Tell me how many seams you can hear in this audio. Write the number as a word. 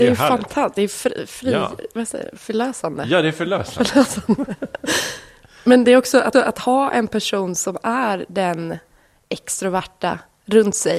one